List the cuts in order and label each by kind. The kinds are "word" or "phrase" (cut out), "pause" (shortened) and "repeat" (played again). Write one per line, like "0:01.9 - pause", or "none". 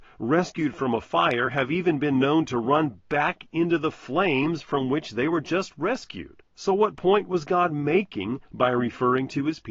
0:06.5 - pause